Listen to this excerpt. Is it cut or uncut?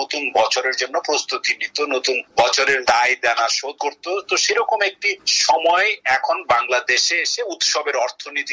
uncut